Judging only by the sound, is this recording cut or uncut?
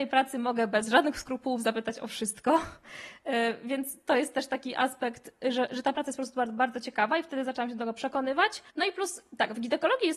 cut